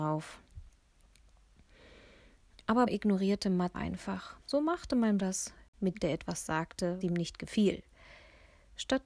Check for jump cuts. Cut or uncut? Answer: cut